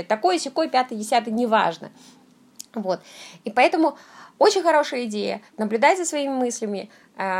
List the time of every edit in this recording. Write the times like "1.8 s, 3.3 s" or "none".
5.5 s